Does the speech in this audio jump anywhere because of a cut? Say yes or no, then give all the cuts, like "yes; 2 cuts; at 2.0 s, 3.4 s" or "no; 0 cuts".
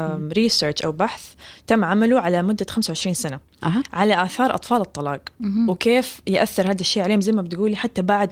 no; 0 cuts